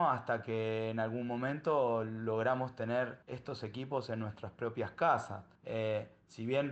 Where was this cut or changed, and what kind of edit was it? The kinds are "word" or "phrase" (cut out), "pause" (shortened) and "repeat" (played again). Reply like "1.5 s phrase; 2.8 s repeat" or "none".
3.2 s pause; 5.6 s pause